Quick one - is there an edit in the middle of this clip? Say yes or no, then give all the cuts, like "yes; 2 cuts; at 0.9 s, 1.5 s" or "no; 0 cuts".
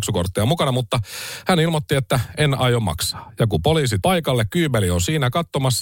yes; 1 cut; at 4.0 s